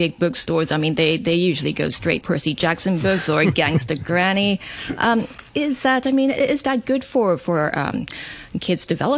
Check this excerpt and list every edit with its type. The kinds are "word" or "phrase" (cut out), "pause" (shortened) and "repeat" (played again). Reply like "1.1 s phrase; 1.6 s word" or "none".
2.2 s word; 5.5 s pause